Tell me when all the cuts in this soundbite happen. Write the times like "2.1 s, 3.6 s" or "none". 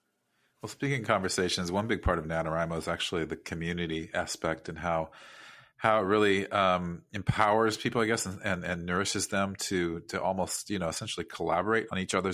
none